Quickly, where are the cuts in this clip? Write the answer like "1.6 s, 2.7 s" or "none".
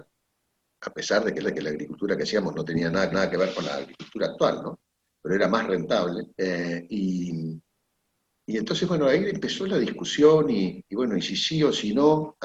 1.4 s, 3.1 s, 6.3 s, 10.9 s